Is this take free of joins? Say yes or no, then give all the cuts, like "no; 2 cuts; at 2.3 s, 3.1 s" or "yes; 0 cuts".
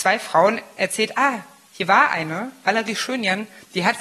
yes; 0 cuts